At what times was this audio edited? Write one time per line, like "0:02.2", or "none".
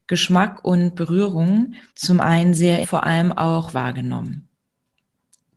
0:01.9
0:02.8
0:03.7